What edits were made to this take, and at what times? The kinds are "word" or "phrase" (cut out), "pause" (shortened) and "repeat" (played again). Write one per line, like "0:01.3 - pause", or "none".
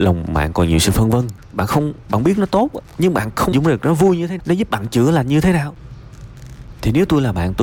0:03.5 - word
0:04.4 - word